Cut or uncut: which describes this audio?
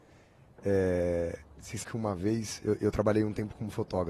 cut